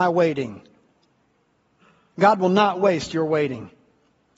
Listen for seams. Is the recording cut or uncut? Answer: uncut